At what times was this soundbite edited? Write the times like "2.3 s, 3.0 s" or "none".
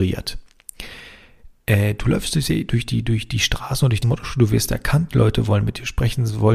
4.0 s